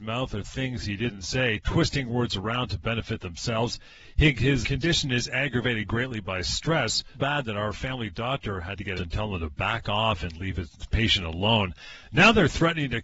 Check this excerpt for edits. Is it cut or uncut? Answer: cut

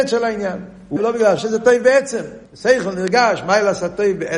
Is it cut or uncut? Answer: cut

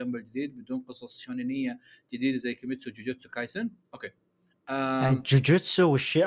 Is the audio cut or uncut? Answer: uncut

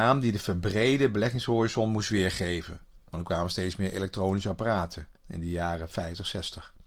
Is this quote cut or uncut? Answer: cut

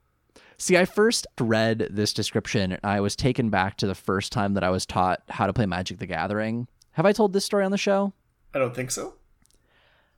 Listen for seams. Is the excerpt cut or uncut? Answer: cut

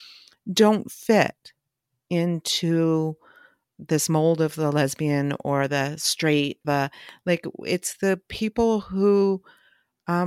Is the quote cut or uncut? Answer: cut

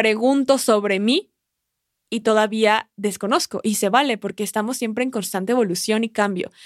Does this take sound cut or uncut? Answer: uncut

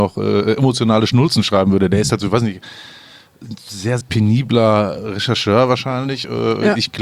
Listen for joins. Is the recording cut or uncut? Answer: cut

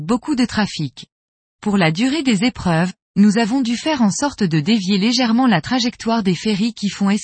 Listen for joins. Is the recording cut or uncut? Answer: uncut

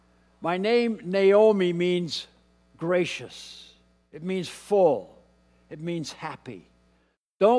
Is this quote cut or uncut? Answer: uncut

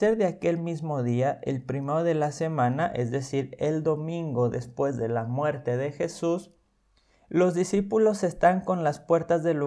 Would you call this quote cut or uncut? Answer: uncut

